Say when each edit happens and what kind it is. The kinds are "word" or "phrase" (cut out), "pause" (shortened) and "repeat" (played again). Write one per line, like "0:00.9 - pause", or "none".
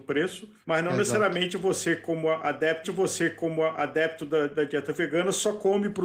0:02.8 - repeat